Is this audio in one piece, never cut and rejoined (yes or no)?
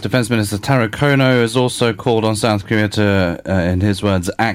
yes